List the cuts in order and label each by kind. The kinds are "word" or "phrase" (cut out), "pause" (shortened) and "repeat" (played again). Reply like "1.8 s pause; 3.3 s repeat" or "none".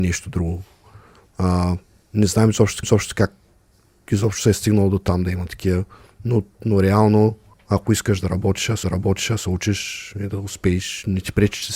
2.8 s repeat; 7.5 s pause; 8.8 s repeat